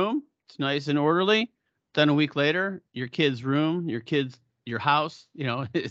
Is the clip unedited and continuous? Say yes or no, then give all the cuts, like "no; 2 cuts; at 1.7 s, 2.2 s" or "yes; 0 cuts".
yes; 0 cuts